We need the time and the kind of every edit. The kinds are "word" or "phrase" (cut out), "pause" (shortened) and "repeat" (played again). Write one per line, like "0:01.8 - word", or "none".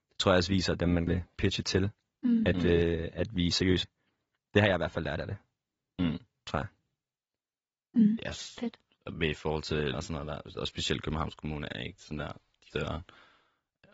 0:01.1 - word
0:03.8 - word
0:09.9 - word
0:12.7 - word

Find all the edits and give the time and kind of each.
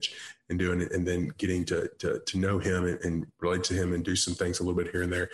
0:03.4 - pause

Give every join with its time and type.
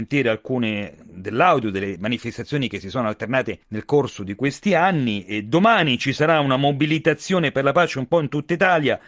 0:03.6 - pause

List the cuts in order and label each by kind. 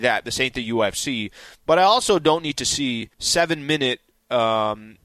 0:03.1 - pause

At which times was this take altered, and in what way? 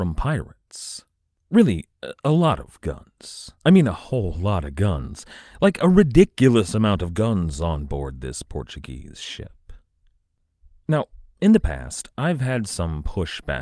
0:03.6 - pause

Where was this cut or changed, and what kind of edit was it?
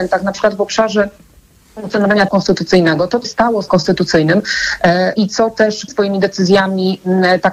0:02.3 - word
0:03.2 - word
0:03.7 - word
0:05.2 - word
0:05.9 - word

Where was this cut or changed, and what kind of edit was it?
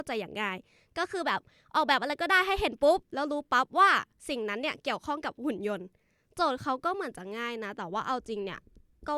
none

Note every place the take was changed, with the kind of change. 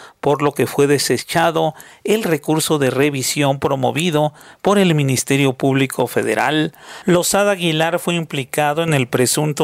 none

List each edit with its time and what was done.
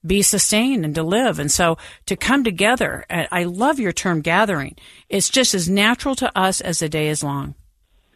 none

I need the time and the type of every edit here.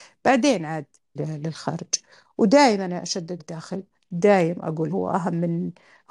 0:01.2 - word
0:03.4 - word
0:04.9 - word

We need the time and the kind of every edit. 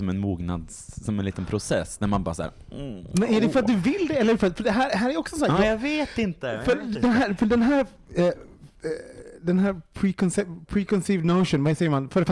none

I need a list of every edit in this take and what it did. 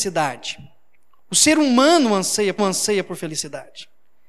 0:02.6 - repeat

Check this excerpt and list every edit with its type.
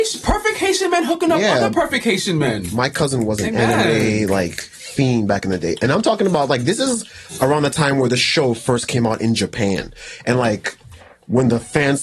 none

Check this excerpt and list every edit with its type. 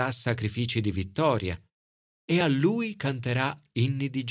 none

